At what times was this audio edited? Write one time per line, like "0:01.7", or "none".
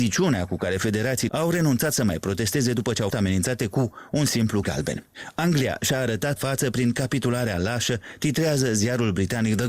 0:01.3
0:03.1
0:04.6
0:06.4